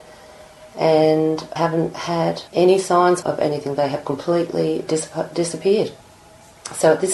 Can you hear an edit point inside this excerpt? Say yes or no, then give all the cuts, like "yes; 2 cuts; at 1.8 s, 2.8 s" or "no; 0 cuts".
yes; 3 cuts; at 1.6 s, 2.5 s, 3.2 s